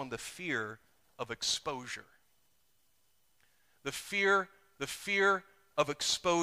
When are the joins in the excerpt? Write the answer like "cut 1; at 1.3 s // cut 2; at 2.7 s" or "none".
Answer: cut 1; at 4.8 s